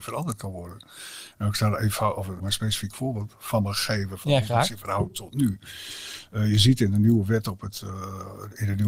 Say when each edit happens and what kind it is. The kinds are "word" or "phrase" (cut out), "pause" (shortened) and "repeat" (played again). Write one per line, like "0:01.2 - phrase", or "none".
0:02.4 - word